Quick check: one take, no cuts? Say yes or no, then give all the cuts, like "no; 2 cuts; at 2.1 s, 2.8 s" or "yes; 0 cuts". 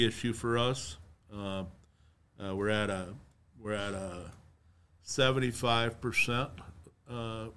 yes; 0 cuts